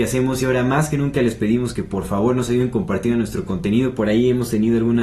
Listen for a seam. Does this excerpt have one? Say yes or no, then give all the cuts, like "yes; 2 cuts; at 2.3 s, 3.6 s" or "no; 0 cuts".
no; 0 cuts